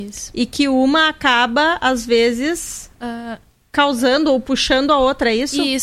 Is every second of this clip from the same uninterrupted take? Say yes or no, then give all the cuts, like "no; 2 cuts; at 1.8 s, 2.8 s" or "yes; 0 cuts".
yes; 0 cuts